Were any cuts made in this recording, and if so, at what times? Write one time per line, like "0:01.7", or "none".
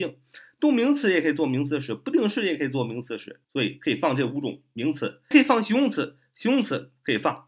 0:03.4
0:05.3

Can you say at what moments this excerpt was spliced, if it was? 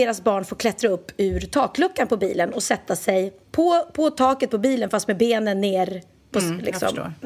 0:03.4

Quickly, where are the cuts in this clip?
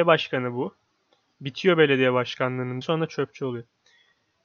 0:02.8

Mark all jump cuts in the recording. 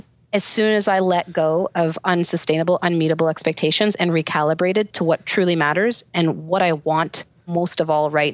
none

